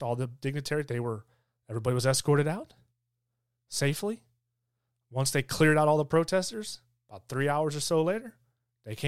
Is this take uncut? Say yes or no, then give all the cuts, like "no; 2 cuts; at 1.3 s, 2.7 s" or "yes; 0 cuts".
yes; 0 cuts